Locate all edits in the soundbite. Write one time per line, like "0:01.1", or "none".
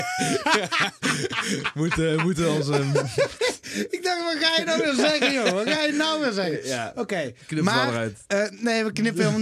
none